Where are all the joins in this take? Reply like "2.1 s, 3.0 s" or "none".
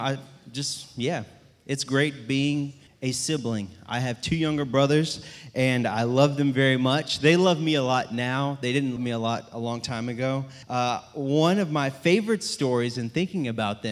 2.9 s, 9.0 s, 10.6 s

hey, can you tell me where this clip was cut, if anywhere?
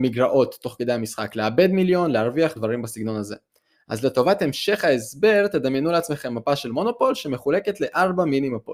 2.6 s

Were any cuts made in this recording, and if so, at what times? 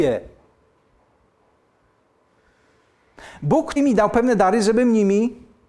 3.8 s

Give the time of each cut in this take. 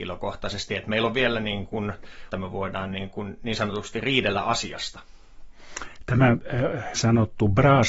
2.3 s, 7.0 s

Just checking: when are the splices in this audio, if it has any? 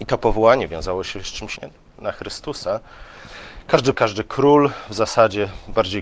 1.6 s, 3.9 s

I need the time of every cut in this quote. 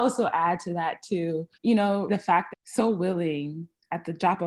1.5 s, 2.1 s, 2.5 s

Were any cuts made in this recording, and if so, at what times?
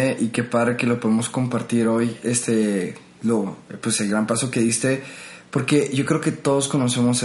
none

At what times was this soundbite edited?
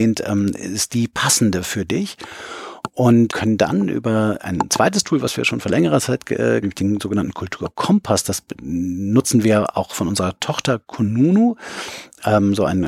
3.3 s, 4.4 s, 6.6 s

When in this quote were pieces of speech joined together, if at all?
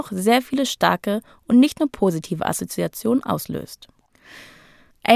none

